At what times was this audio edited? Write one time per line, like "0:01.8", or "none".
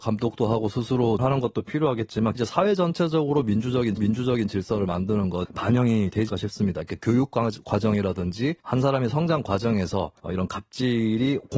0:01.2
0:02.3
0:04.0
0:05.4
0:06.3
0:08.6
0:10.2

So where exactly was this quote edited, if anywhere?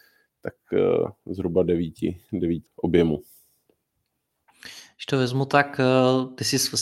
0:02.7

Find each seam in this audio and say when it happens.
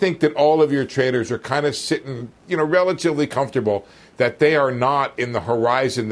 0:02.4

